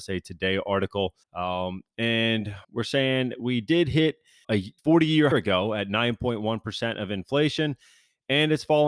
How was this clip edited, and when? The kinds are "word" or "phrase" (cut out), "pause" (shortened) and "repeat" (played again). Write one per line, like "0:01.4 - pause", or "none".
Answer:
0:01.2 - pause
0:02.6 - pause
0:04.4 - word
0:04.8 - pause
0:05.3 - phrase